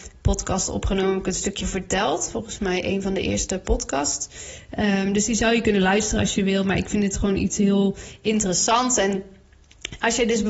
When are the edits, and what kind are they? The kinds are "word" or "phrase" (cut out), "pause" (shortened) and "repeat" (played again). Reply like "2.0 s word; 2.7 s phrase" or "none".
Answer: 1.6 s word